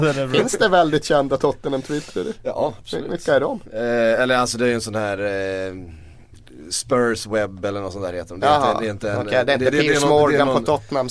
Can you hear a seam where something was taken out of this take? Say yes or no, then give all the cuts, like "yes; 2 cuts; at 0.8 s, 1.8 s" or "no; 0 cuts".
no; 0 cuts